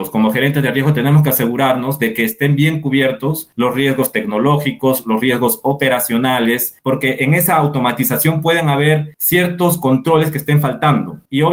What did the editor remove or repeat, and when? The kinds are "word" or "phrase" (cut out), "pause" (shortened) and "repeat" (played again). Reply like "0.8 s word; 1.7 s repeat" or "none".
none